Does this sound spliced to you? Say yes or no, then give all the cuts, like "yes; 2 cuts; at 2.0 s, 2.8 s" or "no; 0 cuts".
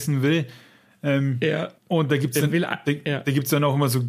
yes; 1 cut; at 1.8 s